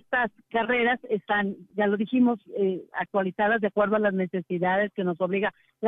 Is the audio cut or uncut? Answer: uncut